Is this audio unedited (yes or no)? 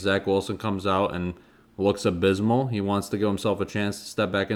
yes